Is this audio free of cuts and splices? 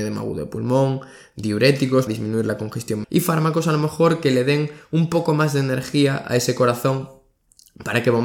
no; 2 cuts; at 2.1 s, 3.0 s

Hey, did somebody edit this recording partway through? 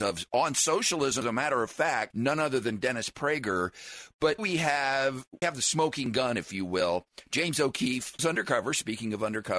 yes; 5 cuts; at 1.2 s, 2.1 s, 4.4 s, 5.4 s, 8.2 s

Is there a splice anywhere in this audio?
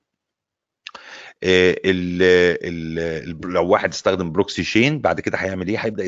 no; 0 cuts

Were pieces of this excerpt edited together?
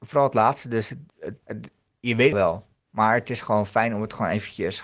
yes; 2 cuts; at 1.4 s, 2.3 s

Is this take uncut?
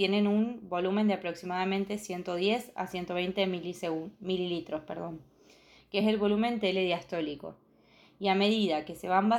yes; 0 cuts

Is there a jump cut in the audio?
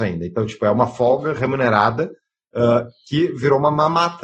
no; 0 cuts

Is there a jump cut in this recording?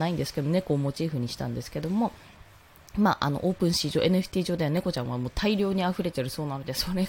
no; 0 cuts

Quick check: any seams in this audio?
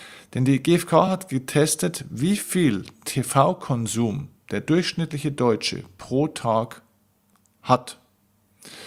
no; 0 cuts

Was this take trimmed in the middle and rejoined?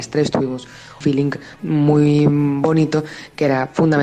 yes; 2 cuts; at 1.0 s, 1.6 s

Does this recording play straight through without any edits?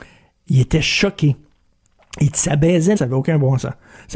no; 1 cut; at 3.0 s

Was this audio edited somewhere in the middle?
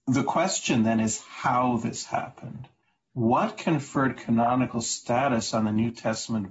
no; 0 cuts

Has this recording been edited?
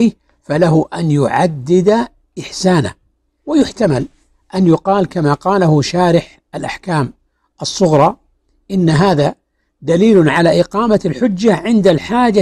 no; 0 cuts

